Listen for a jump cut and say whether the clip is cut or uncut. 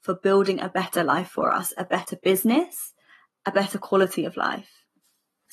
uncut